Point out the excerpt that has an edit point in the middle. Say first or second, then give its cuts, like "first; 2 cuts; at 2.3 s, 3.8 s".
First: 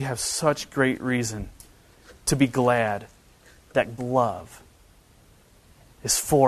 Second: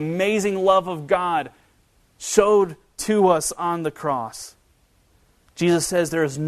first; 1 cut; at 4.0 s